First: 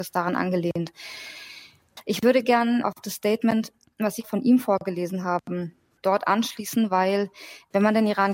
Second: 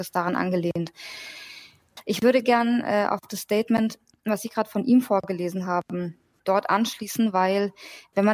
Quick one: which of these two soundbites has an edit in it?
first; 2 cuts; at 2.8 s, 4.2 s

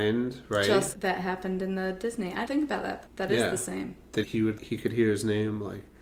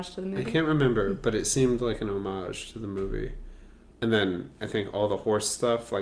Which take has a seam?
first; 4 cuts; at 0.9 s, 2.5 s, 4.2 s, 4.6 s

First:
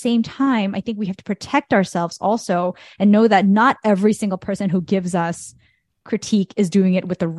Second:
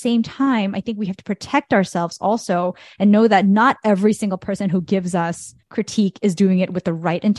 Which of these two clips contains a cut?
second; 1 cut; at 5.6 s

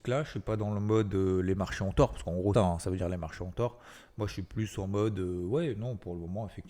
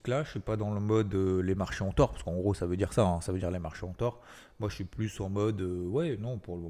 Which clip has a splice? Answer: first; 1 cut; at 2.5 s

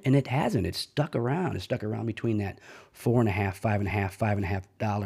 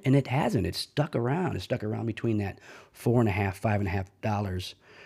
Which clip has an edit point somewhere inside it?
first; 1 cut; at 3.9 s

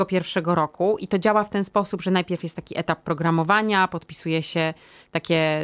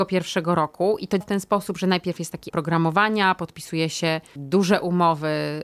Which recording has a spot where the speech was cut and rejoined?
second; 3 cuts; at 1.2 s, 2.5 s, 4.4 s

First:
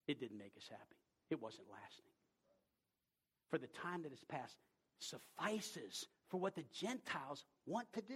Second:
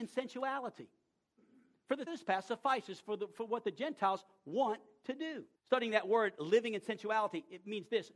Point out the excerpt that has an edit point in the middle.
second; 2 cuts; at 2.1 s, 5.6 s

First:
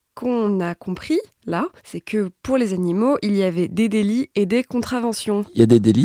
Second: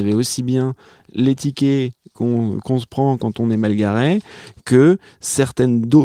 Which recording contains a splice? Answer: first; 1 cut; at 1.8 s

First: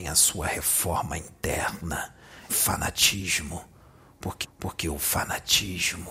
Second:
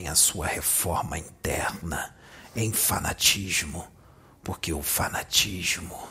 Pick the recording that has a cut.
first; 2 cuts; at 2.5 s, 4.4 s

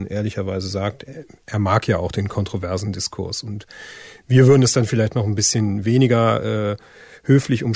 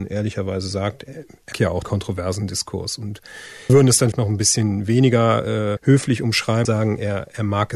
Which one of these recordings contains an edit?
second; 6 cuts; at 1.5 s, 1.8 s, 3.7 s, 4.1 s, 5.8 s, 6.7 s

